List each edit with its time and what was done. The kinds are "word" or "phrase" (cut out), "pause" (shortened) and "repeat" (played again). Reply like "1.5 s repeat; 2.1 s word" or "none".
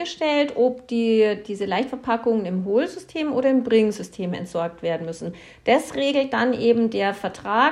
none